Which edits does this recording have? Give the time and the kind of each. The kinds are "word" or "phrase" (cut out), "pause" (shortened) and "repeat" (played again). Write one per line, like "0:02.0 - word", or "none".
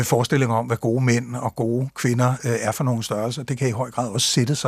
none